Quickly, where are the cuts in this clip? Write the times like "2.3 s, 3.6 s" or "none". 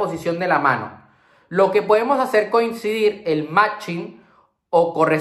none